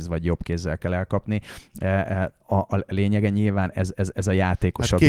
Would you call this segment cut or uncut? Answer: uncut